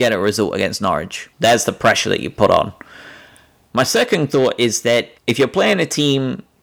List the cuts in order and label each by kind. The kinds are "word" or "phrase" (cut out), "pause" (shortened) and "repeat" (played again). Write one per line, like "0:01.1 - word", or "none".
0:01.3 - pause
0:05.2 - pause